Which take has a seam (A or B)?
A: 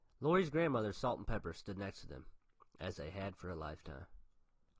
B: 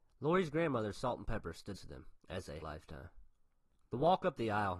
B